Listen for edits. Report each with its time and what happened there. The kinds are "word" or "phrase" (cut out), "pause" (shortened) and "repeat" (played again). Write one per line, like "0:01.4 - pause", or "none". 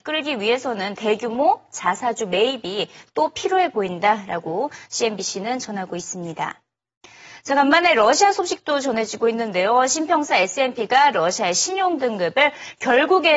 none